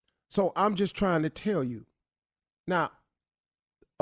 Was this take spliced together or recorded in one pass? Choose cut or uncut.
uncut